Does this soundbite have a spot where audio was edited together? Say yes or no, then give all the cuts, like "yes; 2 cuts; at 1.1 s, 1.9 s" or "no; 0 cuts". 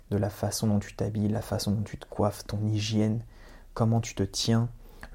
no; 0 cuts